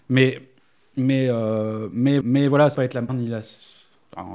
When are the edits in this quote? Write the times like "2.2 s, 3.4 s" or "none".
2.2 s, 2.7 s, 3.1 s